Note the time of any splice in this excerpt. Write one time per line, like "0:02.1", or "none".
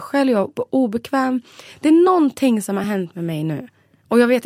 none